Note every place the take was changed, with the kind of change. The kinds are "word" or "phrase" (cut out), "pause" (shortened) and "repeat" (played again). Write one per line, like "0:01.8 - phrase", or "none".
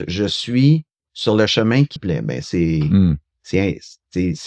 0:02.0 - word
0:02.4 - word